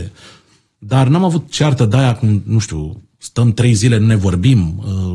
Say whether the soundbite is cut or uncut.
uncut